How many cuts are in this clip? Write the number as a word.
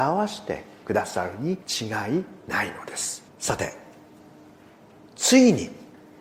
two